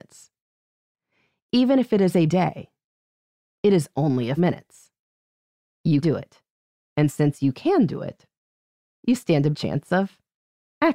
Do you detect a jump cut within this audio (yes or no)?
yes